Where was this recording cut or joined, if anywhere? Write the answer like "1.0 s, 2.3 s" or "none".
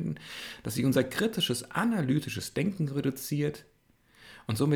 none